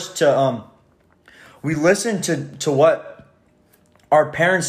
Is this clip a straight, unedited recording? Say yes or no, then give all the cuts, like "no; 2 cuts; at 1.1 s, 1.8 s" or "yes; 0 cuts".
yes; 0 cuts